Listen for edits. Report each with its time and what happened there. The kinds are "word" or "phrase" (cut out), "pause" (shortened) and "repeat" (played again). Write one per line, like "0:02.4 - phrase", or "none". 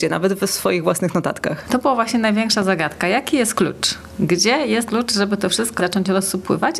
0:04.9 - word
0:05.8 - word